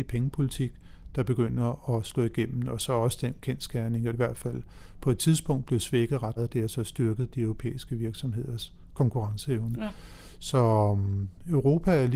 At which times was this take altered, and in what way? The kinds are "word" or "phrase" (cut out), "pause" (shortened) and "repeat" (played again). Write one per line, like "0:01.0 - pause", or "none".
0:04.1 - phrase
0:06.4 - word